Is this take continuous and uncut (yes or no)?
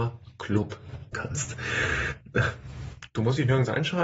no